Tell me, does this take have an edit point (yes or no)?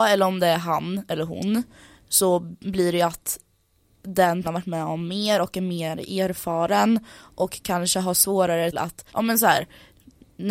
yes